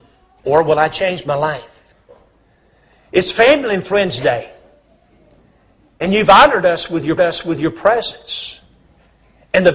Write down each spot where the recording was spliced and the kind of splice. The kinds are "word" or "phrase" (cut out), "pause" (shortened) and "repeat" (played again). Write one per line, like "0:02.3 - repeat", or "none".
0:07.2 - repeat